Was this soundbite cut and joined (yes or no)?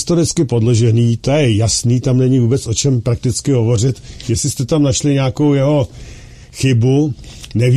no